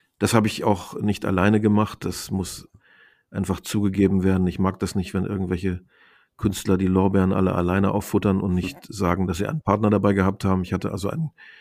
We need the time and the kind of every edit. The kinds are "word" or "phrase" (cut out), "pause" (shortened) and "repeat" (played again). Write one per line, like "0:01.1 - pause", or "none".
none